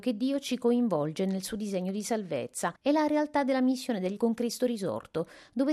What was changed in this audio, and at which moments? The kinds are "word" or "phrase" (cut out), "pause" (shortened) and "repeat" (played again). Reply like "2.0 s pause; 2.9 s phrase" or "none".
2.8 s pause; 4.2 s word